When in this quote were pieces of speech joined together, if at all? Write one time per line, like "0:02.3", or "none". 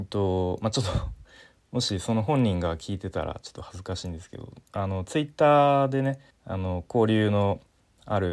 0:06.3